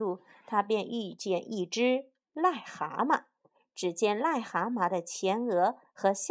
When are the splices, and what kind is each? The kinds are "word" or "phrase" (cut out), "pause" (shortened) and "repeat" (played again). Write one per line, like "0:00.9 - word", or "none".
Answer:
none